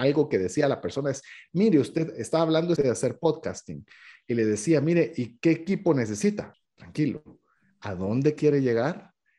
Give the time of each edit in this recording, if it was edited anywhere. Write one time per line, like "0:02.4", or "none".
0:02.7